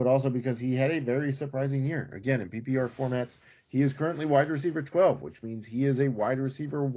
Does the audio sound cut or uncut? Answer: uncut